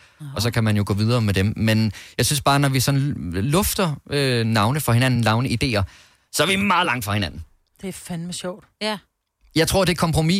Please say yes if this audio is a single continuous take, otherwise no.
yes